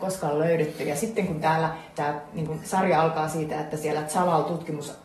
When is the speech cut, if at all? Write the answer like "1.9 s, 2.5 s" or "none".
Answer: none

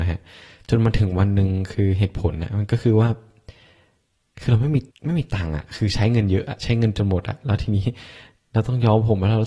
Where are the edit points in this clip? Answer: 4.9 s

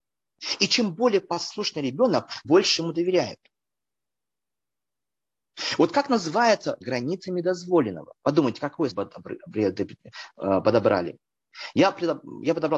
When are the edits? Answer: 2.4 s, 6.8 s, 8.2 s, 8.9 s

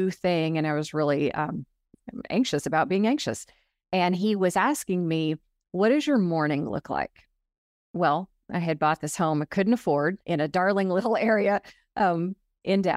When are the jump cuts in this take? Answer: 10.2 s

